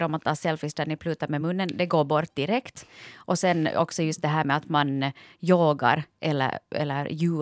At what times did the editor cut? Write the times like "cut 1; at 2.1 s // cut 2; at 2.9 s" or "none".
none